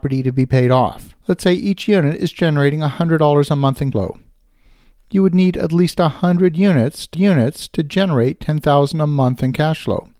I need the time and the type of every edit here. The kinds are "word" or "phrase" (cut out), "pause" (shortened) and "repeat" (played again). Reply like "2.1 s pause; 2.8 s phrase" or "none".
1.2 s pause; 3.9 s word; 7.1 s repeat